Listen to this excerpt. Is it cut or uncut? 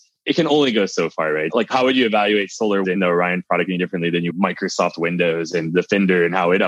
cut